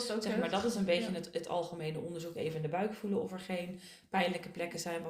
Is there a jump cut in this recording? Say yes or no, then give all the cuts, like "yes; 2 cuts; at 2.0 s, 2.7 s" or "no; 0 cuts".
no; 0 cuts